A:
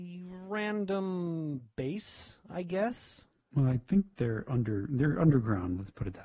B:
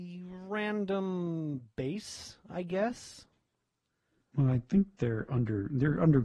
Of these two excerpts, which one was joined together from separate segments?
A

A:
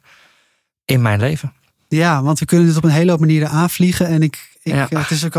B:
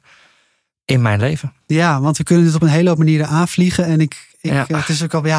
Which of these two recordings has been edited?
B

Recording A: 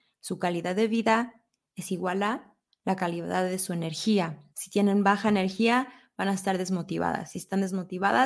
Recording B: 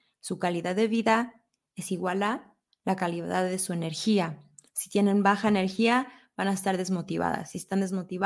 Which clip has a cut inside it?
A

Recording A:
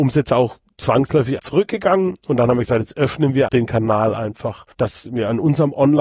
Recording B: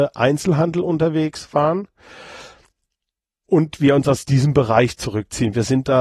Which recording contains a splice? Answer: A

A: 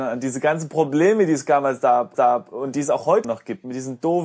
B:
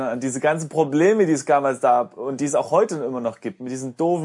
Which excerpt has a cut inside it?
A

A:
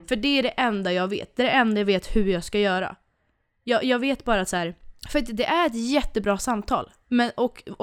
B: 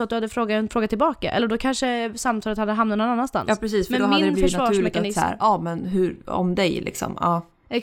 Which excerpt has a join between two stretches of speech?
A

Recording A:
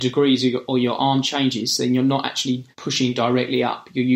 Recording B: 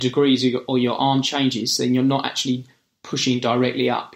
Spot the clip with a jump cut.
A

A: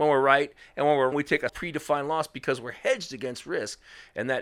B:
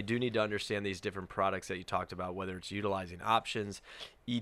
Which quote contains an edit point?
A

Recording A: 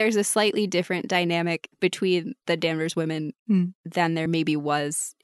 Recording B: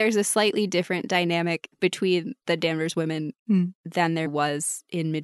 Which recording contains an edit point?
B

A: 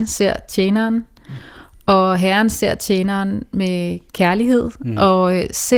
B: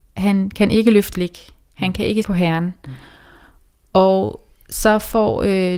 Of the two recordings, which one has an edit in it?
B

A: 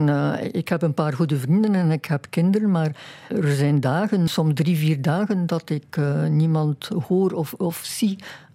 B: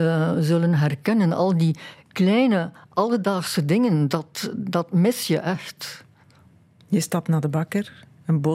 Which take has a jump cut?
A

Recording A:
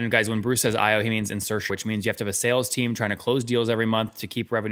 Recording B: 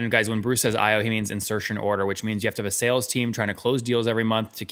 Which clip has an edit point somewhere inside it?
A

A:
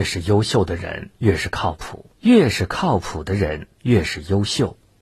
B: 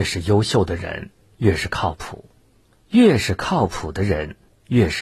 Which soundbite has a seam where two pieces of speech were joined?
A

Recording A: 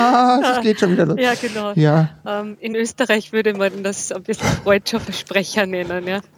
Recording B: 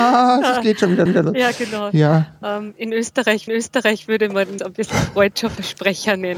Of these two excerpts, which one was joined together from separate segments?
B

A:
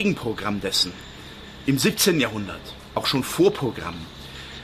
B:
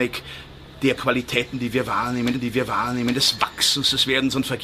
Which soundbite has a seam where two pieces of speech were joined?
B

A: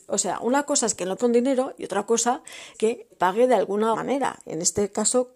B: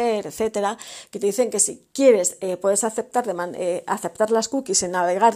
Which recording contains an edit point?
A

